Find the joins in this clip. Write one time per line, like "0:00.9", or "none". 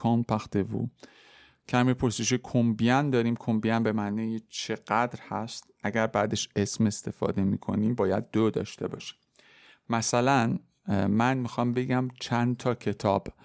none